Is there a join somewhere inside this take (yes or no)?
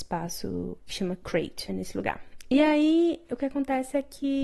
yes